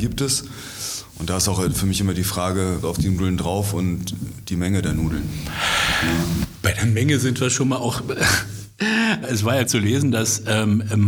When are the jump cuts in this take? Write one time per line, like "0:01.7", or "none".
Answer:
0:02.8
0:09.2
0:09.6